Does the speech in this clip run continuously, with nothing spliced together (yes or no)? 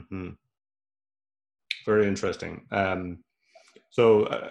yes